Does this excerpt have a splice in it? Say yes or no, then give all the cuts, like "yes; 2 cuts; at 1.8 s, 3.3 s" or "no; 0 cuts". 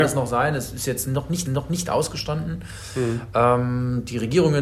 yes; 1 cut; at 1.5 s